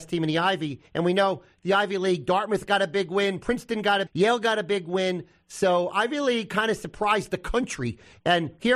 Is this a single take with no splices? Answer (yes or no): no